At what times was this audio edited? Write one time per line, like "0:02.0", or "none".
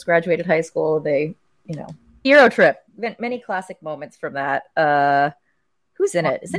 0:02.2
0:02.9